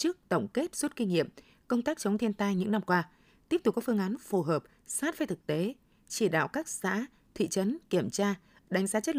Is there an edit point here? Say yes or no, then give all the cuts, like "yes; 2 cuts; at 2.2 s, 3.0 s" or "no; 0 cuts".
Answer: no; 0 cuts